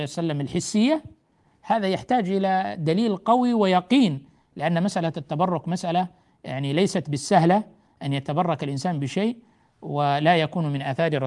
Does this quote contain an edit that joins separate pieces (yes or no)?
no